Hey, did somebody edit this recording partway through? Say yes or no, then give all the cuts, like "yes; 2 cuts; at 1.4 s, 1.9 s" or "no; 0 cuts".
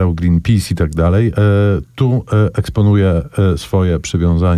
no; 0 cuts